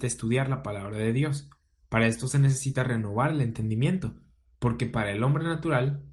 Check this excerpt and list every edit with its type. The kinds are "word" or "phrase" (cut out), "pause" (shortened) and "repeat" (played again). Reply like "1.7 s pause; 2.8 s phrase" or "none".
none